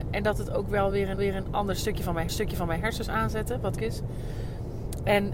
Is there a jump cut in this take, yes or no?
yes